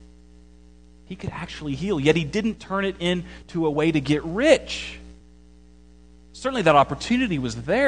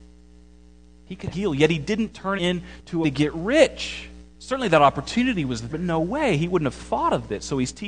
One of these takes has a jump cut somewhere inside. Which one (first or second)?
second